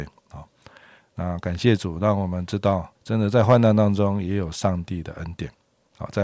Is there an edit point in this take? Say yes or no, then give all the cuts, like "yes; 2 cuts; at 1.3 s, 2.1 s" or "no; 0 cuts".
yes; 1 cut; at 3.0 s